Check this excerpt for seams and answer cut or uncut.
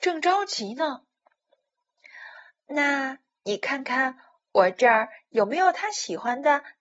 uncut